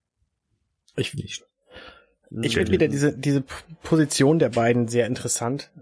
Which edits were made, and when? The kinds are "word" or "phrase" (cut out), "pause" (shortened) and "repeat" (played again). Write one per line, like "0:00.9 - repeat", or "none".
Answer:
none